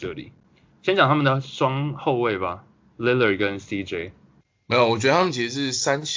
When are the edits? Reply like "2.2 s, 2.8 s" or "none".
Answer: none